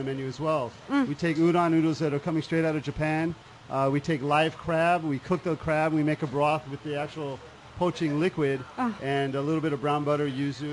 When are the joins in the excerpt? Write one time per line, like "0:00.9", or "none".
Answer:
none